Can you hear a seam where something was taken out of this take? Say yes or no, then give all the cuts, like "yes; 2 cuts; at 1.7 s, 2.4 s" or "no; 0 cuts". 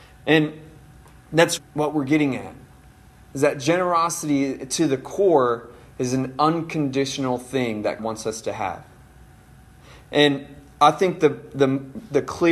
yes; 2 cuts; at 1.6 s, 8.0 s